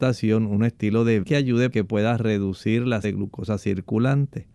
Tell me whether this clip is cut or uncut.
cut